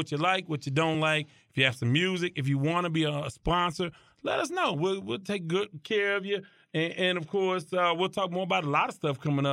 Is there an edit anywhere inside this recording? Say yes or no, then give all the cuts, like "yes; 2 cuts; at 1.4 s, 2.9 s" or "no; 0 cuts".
no; 0 cuts